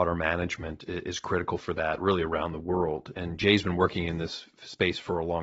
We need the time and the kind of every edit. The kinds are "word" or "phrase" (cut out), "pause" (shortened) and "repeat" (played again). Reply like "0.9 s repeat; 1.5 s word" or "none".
none